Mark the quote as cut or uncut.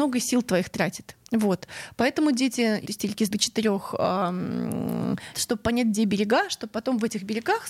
cut